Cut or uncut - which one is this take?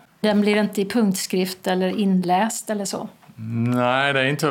uncut